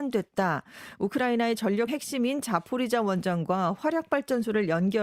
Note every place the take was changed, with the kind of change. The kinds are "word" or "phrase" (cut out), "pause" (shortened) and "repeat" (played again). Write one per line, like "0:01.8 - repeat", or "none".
0:01.9 - word